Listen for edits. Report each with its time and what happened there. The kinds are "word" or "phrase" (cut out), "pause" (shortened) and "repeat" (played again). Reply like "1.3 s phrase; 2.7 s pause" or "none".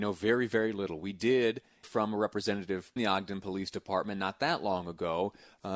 1.8 s word; 3.0 s word